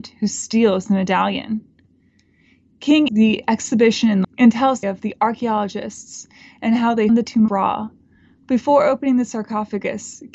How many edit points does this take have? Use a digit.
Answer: 5